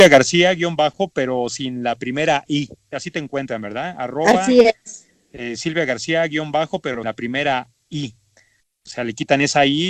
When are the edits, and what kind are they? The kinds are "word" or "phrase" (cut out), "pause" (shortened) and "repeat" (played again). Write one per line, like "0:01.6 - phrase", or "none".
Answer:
0:02.9 - word
0:07.0 - word